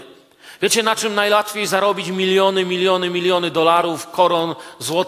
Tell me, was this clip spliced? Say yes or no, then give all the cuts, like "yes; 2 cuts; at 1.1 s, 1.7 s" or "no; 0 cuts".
no; 0 cuts